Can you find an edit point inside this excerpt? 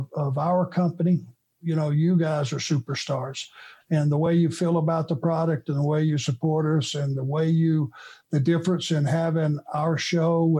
no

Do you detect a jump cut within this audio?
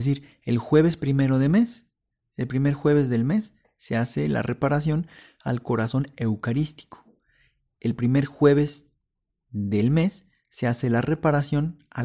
no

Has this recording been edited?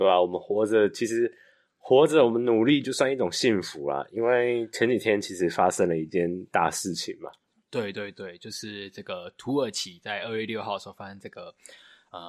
no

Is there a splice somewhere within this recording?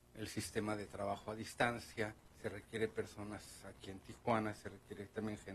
yes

